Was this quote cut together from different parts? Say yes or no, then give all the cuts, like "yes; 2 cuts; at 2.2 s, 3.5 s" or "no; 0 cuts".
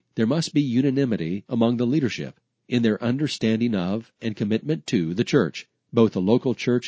no; 0 cuts